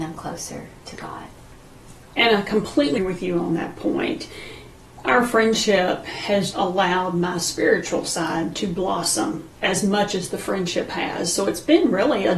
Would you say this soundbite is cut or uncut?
cut